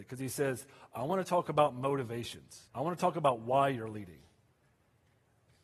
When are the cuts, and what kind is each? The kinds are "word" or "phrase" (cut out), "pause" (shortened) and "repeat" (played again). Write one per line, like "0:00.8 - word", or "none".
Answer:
0:02.7 - pause